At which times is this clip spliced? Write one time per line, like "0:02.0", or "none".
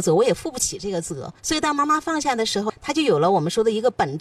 0:01.4

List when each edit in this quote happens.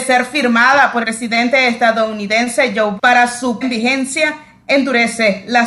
0:01.0
0:03.0
0:03.6

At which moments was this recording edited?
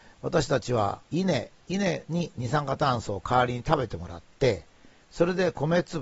0:01.0

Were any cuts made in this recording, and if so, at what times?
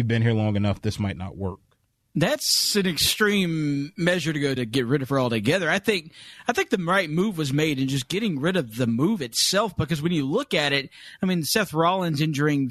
0:04.6

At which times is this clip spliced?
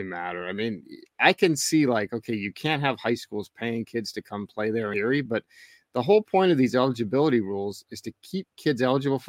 none

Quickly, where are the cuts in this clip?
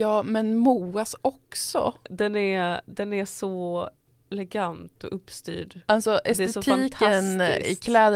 none

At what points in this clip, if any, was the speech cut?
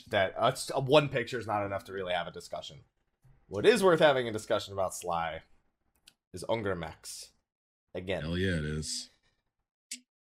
none

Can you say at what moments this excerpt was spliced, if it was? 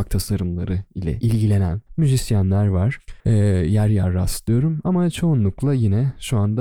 0:01.9
0:03.2

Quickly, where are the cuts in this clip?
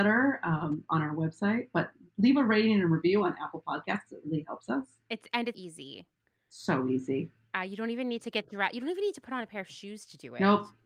0:05.5

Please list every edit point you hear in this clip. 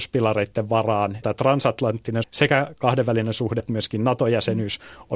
0:01.2
0:02.2
0:03.6

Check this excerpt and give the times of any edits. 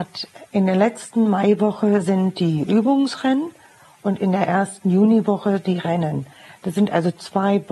none

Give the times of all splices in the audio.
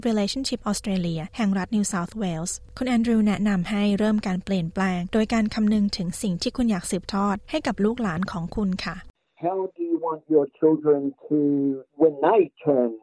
none

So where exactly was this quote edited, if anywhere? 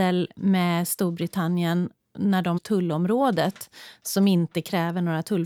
0:02.6

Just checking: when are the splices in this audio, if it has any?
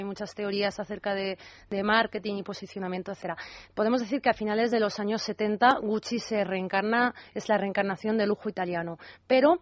none

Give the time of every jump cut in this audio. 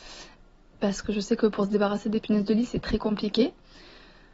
0:02.8

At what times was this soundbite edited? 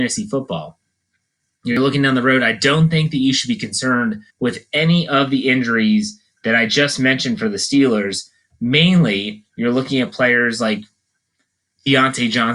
0:04.3

